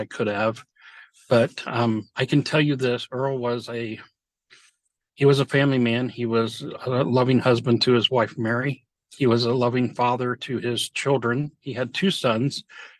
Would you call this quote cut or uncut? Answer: uncut